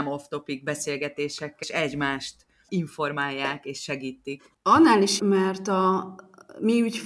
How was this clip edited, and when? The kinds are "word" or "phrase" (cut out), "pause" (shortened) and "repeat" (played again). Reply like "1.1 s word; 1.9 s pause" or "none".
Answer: 1.6 s word; 2.7 s word; 5.2 s word

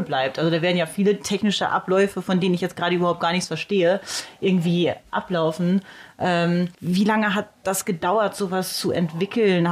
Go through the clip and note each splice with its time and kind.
6.7 s pause

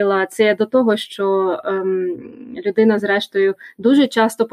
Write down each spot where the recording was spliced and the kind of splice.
none

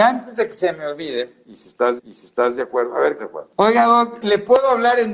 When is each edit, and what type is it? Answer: 2.0 s repeat; 3.2 s phrase; 3.5 s pause; 4.2 s word

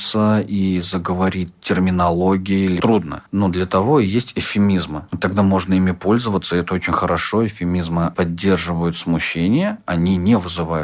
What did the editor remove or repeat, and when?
3.3 s pause; 5.1 s pause

